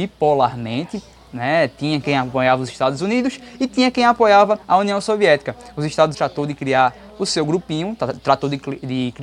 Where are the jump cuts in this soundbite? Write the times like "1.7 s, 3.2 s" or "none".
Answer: 4.6 s, 6.1 s